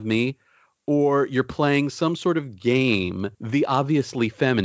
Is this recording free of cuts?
no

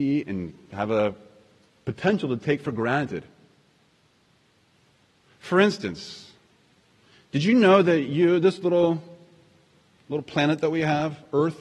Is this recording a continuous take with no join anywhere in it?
yes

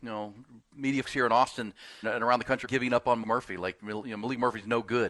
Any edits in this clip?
yes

